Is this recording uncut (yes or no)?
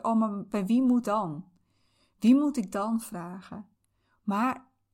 no